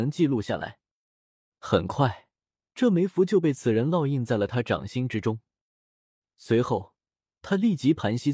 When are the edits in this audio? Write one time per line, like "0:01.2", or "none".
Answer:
none